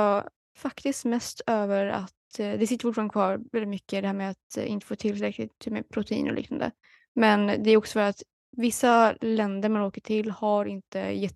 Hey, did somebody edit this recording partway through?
no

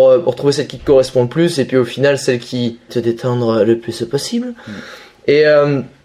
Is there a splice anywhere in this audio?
yes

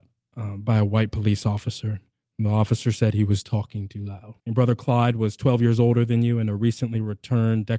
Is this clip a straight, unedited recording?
no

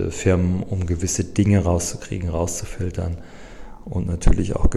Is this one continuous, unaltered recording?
yes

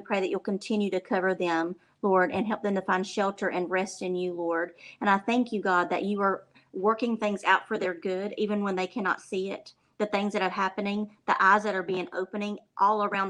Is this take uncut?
yes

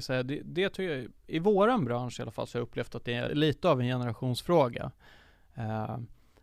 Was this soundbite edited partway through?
yes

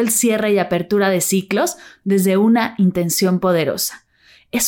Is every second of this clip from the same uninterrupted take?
yes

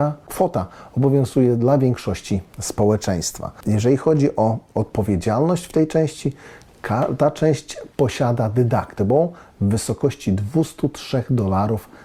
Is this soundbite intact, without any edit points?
yes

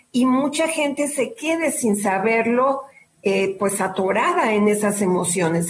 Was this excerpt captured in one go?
yes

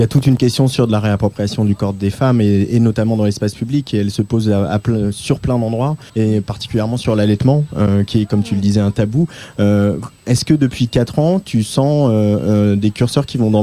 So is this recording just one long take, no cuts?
no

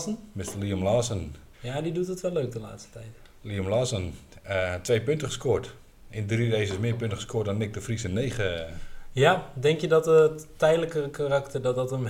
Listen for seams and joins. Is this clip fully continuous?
no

